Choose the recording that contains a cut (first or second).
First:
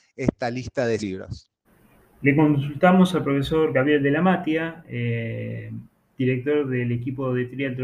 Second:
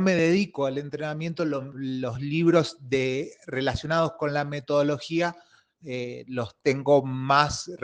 first